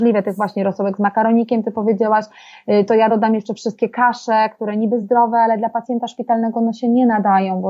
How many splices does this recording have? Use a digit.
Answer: 0